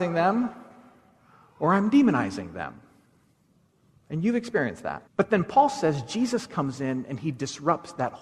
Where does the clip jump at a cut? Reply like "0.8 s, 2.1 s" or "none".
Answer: 5.1 s